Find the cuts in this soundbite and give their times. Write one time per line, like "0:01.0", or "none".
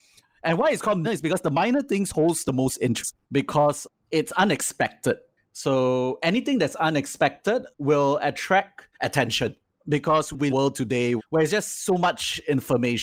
0:01.0
0:03.2
0:07.7
0:08.9
0:10.5
0:11.2

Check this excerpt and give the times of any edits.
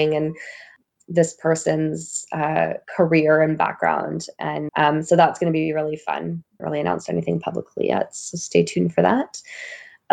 0:02.8
0:04.7
0:06.6

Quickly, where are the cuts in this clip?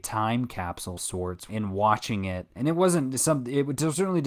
0:01.0
0:01.5
0:02.6

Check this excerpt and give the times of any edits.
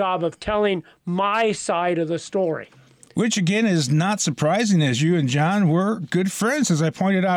none

